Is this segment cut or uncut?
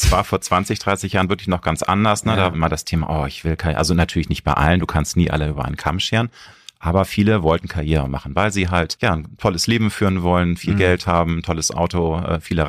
cut